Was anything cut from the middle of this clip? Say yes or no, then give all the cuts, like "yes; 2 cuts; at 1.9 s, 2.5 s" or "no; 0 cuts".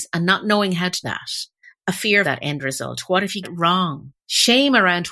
yes; 4 cuts; at 1.0 s, 2.2 s, 3.4 s, 4.2 s